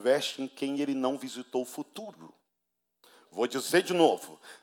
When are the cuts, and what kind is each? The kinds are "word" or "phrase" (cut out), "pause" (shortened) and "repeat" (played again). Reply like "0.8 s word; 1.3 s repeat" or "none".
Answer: none